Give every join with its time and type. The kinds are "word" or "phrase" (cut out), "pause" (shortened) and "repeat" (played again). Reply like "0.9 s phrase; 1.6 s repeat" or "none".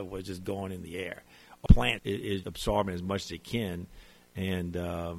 1.7 s word; 2.0 s word; 2.4 s word